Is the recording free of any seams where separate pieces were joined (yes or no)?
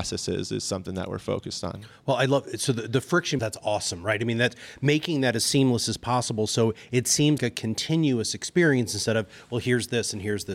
no